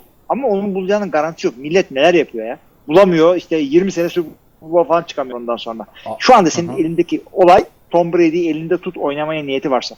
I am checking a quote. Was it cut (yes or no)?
yes